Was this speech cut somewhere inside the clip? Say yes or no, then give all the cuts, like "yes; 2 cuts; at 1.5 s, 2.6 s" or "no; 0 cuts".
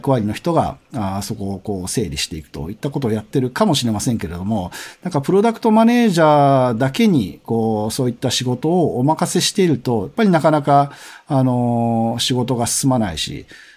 no; 0 cuts